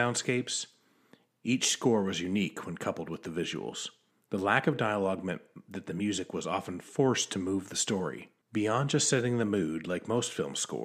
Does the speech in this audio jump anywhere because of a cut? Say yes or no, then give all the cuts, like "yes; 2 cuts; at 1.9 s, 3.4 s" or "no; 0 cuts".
yes; 2 cuts; at 4.1 s, 8.4 s